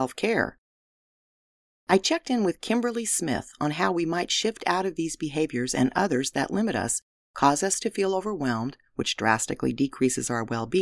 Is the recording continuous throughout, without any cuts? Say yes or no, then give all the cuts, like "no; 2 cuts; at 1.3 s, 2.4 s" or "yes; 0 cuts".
yes; 0 cuts